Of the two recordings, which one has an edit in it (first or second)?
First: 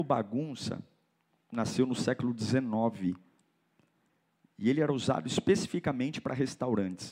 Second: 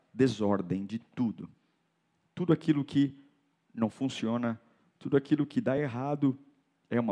first